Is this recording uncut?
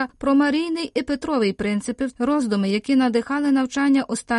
no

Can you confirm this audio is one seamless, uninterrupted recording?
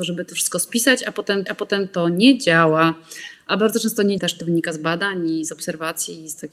no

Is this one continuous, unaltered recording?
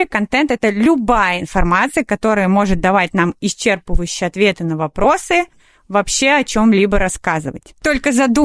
yes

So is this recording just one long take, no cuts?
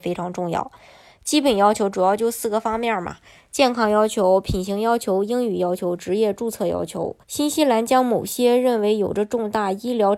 no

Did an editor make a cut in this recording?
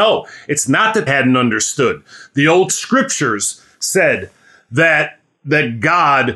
yes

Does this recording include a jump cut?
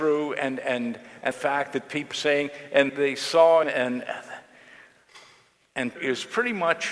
yes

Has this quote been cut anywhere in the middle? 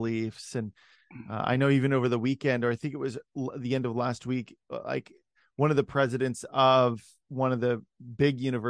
no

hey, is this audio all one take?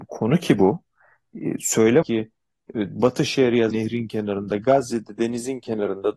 no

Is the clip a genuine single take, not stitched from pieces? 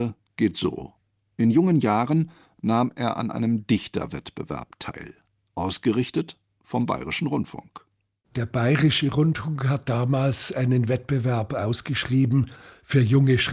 yes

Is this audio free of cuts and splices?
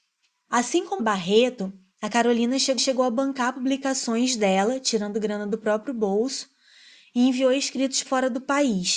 no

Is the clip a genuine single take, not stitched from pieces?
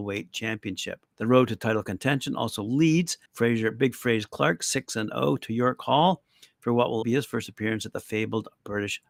no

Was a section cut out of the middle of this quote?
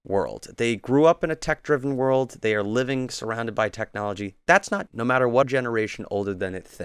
yes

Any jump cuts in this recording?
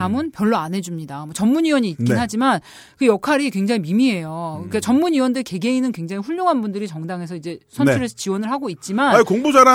no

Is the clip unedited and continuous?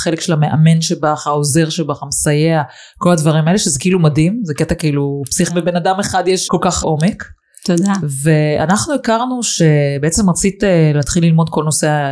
no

